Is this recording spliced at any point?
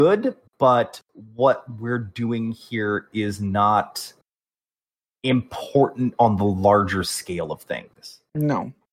no; 0 cuts

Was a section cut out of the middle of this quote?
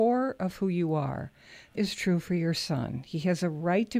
yes; 1 cut; at 1.7 s

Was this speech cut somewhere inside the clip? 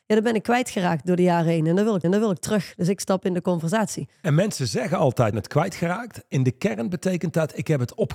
yes; 2 cuts; at 2.0 s, 5.3 s

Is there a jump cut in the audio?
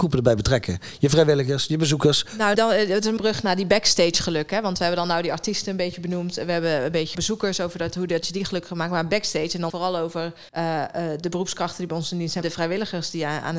yes; 6 cuts; at 2.5 s, 3.2 s, 7.1 s, 9.7 s, 10.5 s, 12.4 s

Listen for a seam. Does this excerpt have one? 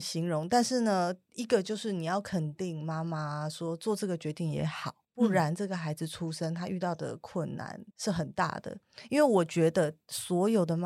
yes; 1 cut; at 7.9 s

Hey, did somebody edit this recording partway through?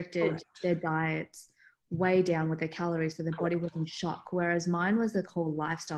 no; 0 cuts

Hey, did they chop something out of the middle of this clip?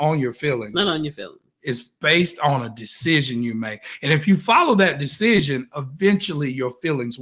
no; 0 cuts

